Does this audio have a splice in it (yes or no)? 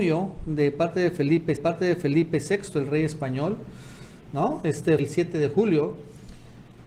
yes